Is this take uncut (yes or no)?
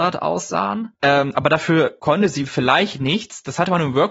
yes